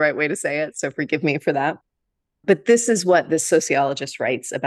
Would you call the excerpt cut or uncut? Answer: uncut